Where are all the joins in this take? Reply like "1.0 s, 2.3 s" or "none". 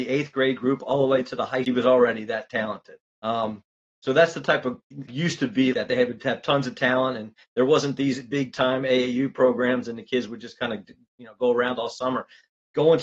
1.6 s, 3.0 s, 5.1 s, 5.7 s